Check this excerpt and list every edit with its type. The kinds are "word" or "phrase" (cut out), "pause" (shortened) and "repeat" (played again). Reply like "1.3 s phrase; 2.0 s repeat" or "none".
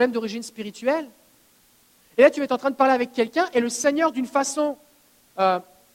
none